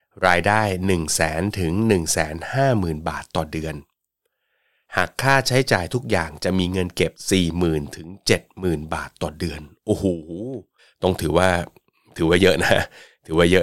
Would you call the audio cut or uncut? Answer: cut